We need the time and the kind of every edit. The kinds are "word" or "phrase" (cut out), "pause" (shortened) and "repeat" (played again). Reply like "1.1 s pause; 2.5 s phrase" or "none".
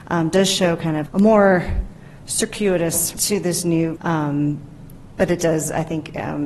1.1 s word; 3.2 s word; 4.0 s word